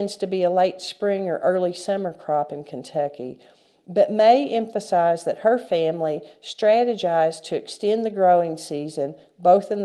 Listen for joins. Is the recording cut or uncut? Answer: uncut